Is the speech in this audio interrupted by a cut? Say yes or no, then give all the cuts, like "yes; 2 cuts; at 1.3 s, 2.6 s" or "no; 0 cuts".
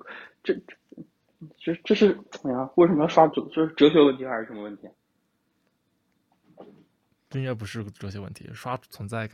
no; 0 cuts